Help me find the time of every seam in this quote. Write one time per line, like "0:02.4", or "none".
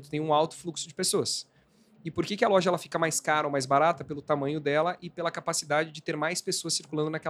none